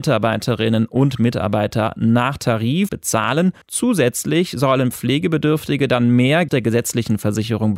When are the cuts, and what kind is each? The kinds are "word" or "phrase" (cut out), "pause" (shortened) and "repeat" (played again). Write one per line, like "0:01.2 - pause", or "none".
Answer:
0:02.9 - phrase
0:03.6 - pause
0:06.5 - phrase

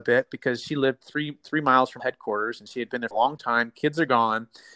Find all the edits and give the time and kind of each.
0:02.0 - word
0:03.1 - phrase

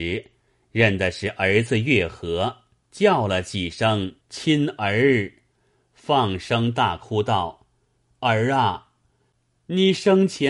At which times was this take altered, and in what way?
0:04.2 - pause

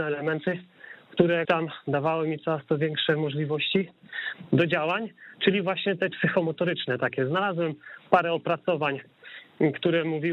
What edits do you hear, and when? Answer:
0:01.4 - word
0:06.1 - word

